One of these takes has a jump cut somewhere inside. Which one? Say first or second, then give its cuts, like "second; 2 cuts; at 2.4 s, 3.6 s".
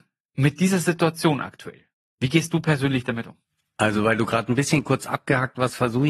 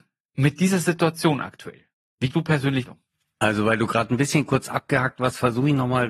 second; 2 cuts; at 2.3 s, 2.9 s